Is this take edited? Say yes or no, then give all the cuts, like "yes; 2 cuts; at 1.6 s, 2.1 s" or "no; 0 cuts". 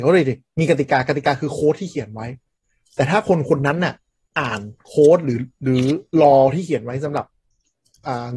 no; 0 cuts